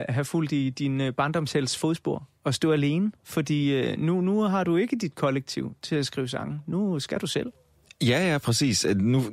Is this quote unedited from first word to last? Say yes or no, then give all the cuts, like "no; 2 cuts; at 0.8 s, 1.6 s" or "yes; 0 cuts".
yes; 0 cuts